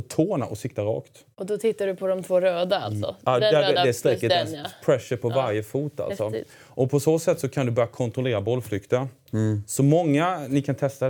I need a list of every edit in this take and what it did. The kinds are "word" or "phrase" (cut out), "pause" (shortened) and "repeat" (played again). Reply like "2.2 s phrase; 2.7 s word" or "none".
none